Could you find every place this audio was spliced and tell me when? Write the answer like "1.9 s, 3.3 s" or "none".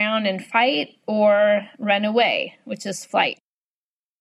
none